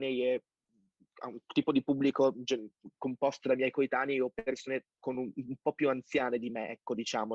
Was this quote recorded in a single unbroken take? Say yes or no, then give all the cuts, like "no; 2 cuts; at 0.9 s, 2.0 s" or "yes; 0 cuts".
yes; 0 cuts